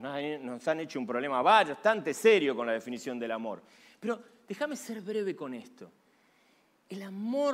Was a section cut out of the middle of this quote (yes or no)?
no